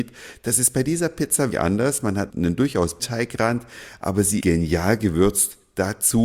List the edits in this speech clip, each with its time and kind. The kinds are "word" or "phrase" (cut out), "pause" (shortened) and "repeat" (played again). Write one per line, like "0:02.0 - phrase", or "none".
0:01.5 - word
0:02.3 - word
0:03.0 - word
0:04.4 - word